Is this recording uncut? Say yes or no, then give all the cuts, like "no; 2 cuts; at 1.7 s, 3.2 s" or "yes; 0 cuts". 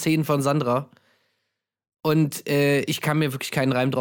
yes; 0 cuts